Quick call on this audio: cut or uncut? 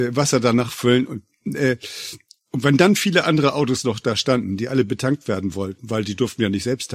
uncut